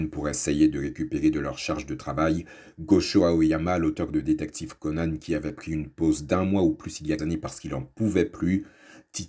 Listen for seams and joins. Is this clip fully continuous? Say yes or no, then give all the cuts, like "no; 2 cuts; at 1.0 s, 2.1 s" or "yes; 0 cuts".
no; 1 cut; at 7.2 s